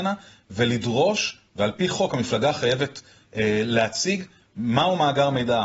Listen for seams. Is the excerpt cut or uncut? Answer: uncut